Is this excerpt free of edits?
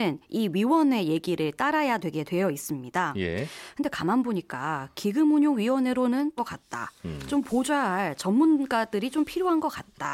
no; 1 cut; at 6.4 s

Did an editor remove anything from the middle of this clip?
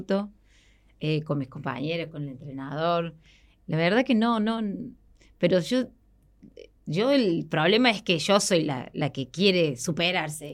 yes; 1 cut; at 6.8 s

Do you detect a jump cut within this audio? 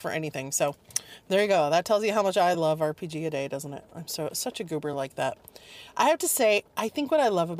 no; 0 cuts

